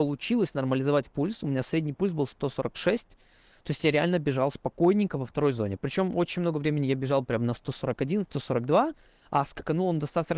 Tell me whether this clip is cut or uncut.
uncut